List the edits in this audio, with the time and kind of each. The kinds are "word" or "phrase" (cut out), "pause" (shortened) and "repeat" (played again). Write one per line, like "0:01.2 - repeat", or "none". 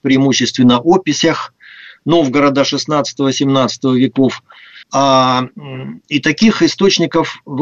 0:04.8 - pause

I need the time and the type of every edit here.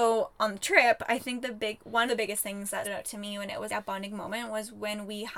0:02.1 - word
0:02.8 - word
0:03.7 - word

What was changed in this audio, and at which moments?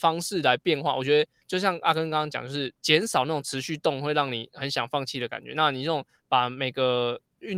0:01.4 - pause

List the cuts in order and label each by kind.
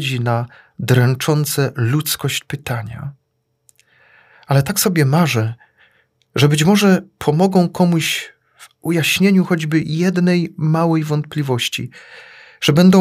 none

